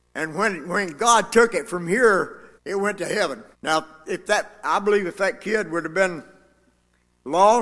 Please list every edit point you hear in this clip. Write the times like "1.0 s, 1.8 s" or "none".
2.6 s, 3.5 s